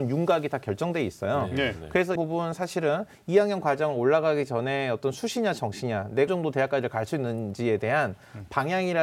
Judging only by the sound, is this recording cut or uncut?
cut